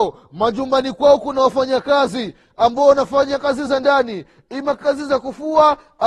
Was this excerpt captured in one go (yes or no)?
yes